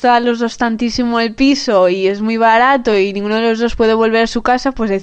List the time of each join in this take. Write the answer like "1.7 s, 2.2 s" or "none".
none